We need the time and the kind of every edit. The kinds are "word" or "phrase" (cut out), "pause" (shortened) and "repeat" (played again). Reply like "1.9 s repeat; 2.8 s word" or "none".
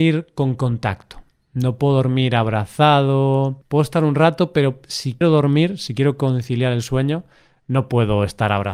5.2 s word